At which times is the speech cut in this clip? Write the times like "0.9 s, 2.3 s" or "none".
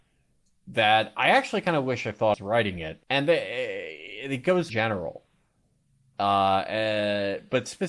2.3 s, 3.0 s, 4.7 s